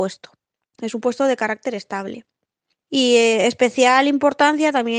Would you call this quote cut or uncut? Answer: uncut